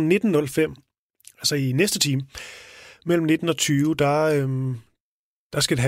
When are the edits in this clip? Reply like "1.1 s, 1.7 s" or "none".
none

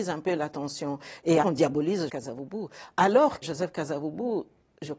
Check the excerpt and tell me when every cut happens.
1.4 s, 2.1 s, 3.4 s

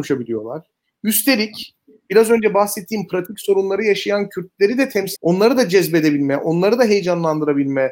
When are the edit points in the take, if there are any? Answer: 5.2 s

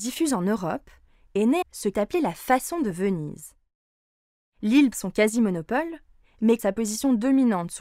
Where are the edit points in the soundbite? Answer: 1.6 s, 1.9 s, 4.9 s, 6.6 s

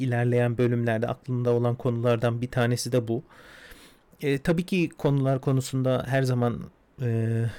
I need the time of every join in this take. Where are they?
none

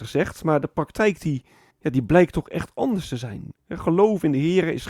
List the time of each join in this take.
1.7 s, 3.6 s

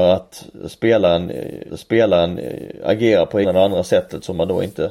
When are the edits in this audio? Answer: 1.7 s, 3.4 s

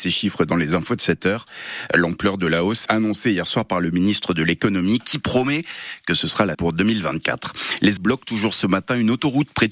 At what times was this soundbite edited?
2.9 s, 6.5 s, 8.0 s

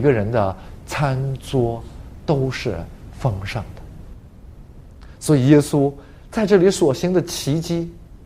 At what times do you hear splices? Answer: none

